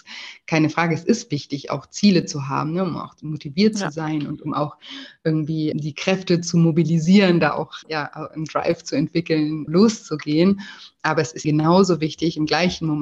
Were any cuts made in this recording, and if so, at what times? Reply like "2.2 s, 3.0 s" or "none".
5.7 s, 7.8 s, 9.7 s, 11.4 s